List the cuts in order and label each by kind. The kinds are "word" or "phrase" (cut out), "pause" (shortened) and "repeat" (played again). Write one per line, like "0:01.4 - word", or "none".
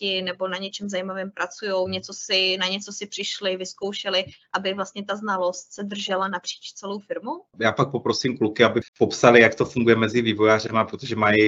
0:07.5 - pause
0:08.9 - pause

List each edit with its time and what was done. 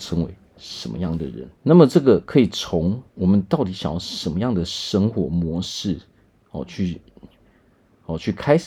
0:01.5 - pause
0:03.1 - pause

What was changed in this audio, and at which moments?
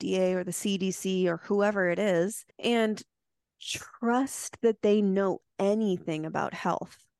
0:02.5 - pause

